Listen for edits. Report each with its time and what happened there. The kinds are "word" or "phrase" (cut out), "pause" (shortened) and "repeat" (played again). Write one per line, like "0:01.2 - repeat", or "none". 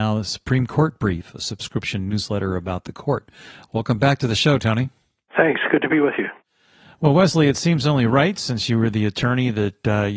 none

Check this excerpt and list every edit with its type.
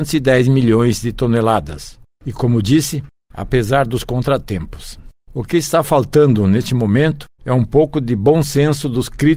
0:07.3 - pause

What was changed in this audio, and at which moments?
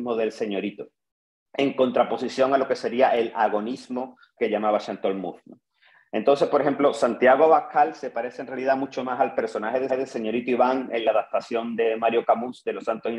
0:04.4 - word
0:09.9 - repeat

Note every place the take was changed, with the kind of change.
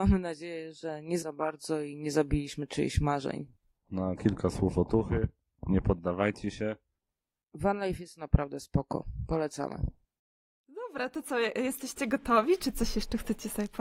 0:01.2 - word
0:04.2 - word
0:10.2 - pause

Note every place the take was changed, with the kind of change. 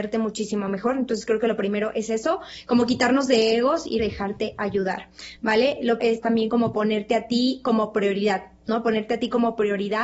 0:04.0 - word
0:06.0 - word

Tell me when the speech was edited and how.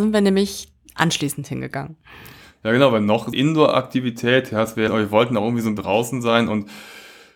0:03.3 - word
0:04.9 - phrase
0:05.8 - word

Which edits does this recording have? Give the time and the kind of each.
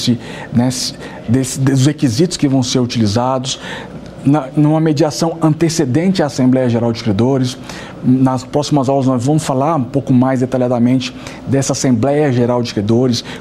none

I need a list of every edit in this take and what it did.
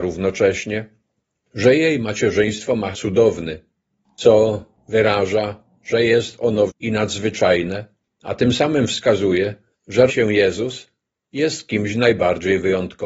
0:02.9 - word
0:06.7 - word
0:10.1 - word

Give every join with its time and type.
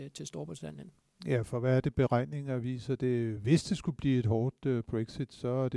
none

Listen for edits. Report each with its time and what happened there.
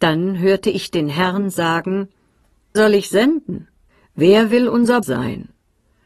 0:02.8 - word
0:03.9 - pause
0:05.0 - word

